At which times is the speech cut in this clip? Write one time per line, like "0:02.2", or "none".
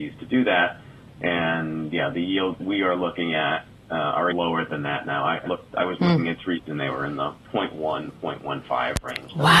0:02.6
0:04.3
0:05.5
0:06.7